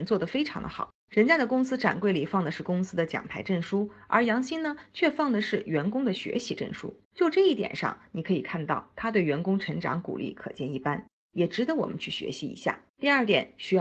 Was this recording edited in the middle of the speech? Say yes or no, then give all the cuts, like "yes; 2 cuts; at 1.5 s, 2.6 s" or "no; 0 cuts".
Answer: yes; 2 cuts; at 7.0 s, 12.9 s